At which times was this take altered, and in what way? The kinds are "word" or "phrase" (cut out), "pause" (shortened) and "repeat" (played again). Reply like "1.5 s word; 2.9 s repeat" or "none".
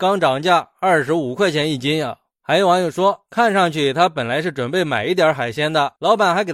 none